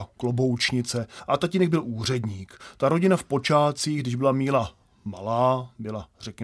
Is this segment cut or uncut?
uncut